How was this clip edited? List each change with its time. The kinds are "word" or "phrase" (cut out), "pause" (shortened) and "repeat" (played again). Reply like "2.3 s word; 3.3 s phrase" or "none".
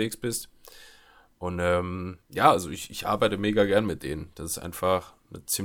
2.2 s pause